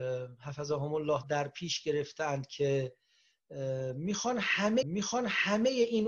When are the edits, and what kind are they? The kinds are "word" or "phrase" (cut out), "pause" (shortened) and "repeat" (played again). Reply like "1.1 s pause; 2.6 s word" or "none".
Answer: 1.2 s word; 4.8 s repeat